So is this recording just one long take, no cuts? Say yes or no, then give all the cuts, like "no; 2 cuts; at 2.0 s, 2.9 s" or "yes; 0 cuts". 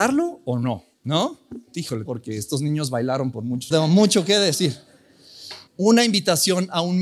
no; 4 cuts; at 0.9 s, 2.1 s, 3.7 s, 5.7 s